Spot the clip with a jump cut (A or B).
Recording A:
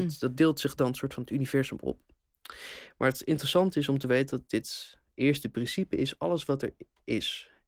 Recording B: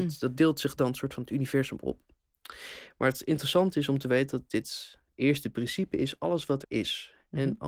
B